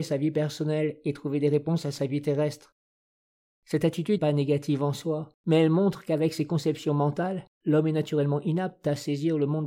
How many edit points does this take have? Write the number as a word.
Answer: three